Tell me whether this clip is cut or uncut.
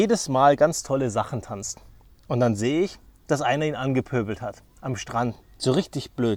uncut